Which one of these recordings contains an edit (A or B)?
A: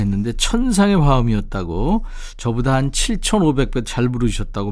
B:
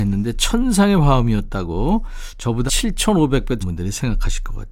B